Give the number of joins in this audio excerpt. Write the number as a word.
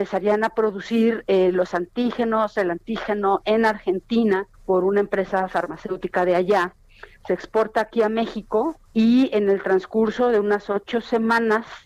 two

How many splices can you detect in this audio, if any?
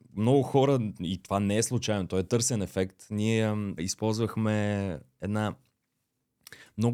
one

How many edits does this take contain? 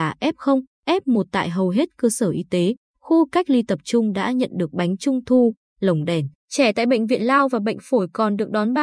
one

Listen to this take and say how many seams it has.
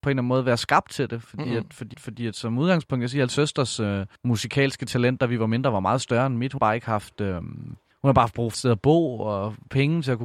six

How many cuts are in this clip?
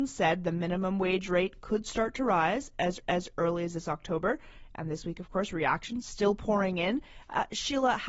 one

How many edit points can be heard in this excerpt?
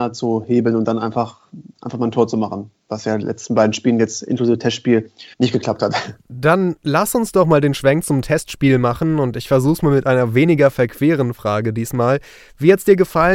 two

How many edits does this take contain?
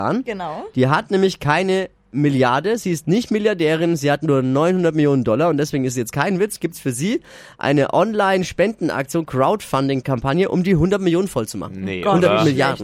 zero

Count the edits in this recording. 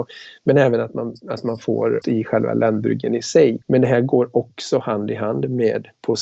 two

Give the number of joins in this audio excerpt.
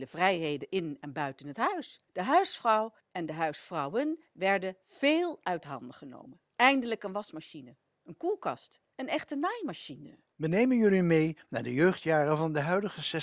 five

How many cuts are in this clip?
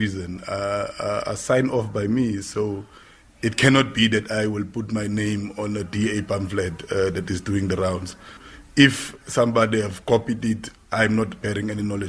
zero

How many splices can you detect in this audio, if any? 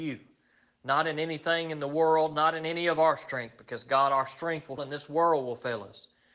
one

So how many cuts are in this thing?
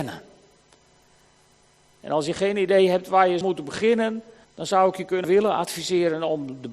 three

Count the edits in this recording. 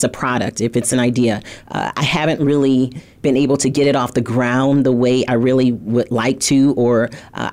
zero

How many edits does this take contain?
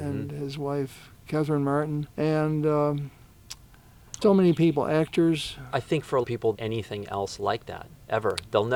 five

